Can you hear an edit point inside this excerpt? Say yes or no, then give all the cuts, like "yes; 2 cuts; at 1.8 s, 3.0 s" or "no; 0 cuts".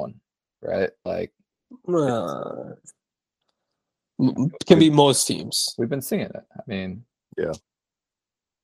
no; 0 cuts